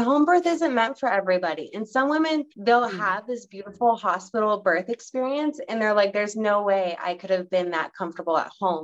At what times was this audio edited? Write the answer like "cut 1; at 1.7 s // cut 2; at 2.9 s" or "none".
cut 1; at 2.5 s